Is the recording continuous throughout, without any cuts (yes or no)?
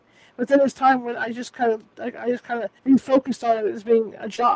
no